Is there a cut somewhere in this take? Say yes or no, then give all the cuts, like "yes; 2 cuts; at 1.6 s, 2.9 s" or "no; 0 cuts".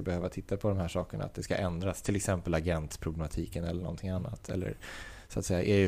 no; 0 cuts